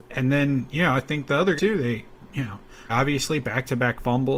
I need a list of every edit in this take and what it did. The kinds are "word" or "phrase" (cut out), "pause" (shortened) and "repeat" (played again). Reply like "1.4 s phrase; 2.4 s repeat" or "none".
1.6 s word; 2.9 s word